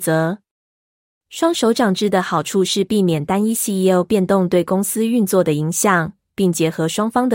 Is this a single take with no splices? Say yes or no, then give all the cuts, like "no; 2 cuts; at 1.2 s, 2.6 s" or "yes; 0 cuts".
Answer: yes; 0 cuts